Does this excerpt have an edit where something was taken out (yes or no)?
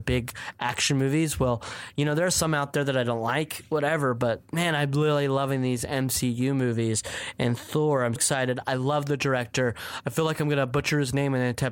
yes